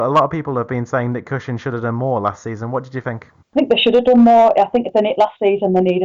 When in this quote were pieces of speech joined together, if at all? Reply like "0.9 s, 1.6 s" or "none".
3.4 s